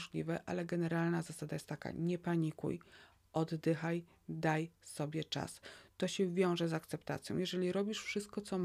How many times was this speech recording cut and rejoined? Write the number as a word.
zero